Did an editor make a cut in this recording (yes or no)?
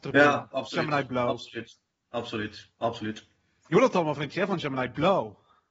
no